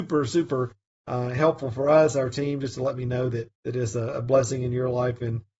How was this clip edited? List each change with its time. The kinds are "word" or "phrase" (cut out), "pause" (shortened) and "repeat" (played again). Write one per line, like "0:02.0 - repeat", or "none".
0:03.5 - pause